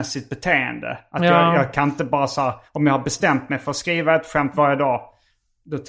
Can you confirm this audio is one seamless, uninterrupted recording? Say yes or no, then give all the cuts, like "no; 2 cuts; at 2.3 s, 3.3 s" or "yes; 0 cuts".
yes; 0 cuts